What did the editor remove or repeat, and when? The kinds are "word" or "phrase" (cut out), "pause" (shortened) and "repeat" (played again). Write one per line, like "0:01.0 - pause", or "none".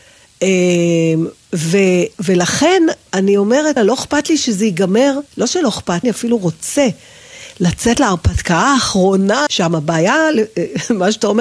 0:02.1 - word
0:03.1 - word
0:03.8 - word
0:05.3 - pause
0:06.0 - phrase
0:09.5 - phrase